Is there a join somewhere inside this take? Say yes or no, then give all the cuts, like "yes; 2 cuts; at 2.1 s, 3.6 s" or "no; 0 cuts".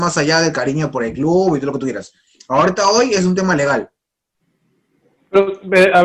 no; 0 cuts